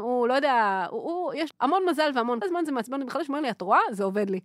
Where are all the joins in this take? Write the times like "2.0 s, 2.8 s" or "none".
1.5 s, 2.4 s